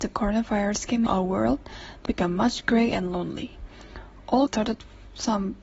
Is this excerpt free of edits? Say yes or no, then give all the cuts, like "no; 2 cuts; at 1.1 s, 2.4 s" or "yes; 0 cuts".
no; 3 cuts; at 1.1 s, 2.1 s, 4.5 s